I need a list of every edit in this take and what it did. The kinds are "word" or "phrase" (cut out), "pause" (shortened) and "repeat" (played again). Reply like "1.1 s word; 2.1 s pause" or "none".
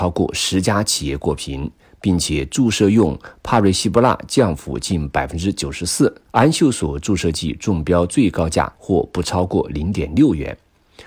6.3 s pause; 8.8 s pause